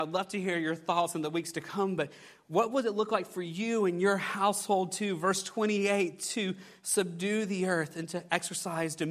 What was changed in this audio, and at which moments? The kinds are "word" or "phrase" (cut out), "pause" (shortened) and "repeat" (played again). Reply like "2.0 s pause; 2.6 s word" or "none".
none